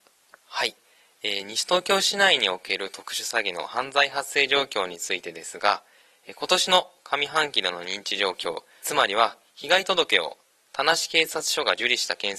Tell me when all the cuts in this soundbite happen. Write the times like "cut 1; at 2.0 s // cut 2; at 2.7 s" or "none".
cut 1; at 8.8 s